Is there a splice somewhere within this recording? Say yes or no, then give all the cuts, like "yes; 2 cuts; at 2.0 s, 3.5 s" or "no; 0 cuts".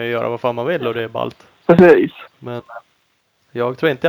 yes; 1 cut; at 2.3 s